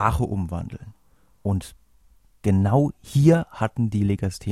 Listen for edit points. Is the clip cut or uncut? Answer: uncut